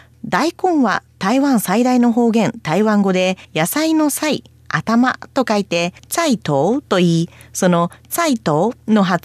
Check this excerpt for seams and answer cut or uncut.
cut